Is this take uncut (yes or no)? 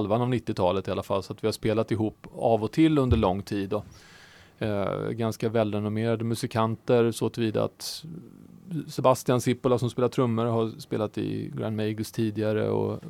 yes